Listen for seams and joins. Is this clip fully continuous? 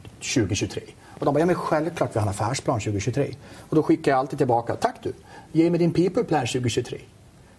yes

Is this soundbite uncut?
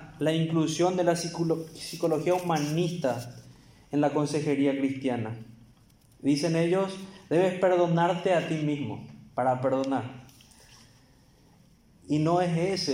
yes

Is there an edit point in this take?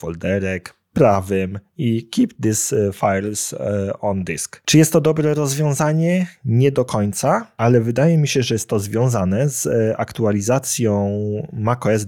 no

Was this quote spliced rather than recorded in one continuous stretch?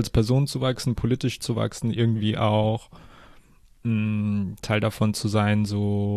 no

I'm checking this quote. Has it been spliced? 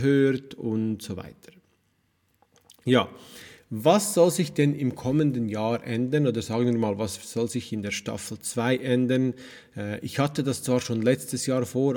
no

